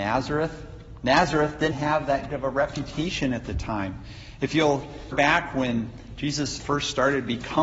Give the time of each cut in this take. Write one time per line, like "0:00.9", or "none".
0:01.7
0:02.3
0:05.1
0:06.6